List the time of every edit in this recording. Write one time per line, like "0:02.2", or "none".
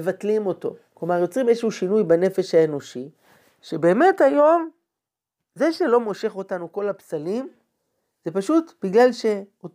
none